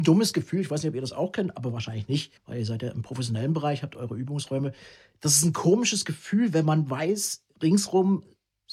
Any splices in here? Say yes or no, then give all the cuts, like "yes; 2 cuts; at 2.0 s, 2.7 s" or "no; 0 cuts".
yes; 1 cut; at 2.4 s